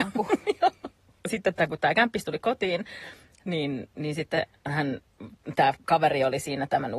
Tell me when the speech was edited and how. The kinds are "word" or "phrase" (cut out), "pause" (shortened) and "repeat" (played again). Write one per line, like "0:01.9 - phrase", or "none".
none